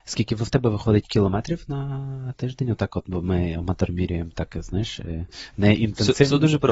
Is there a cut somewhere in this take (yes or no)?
no